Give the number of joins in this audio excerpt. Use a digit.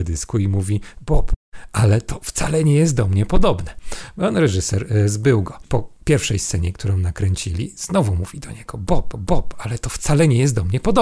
1